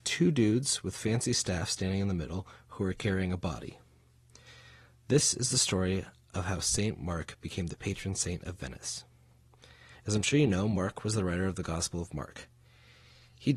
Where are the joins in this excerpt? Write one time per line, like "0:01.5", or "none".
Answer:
none